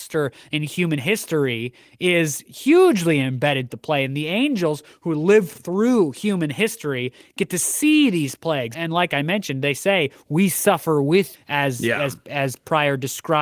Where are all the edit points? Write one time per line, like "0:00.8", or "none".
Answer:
0:03.7
0:08.7
0:11.3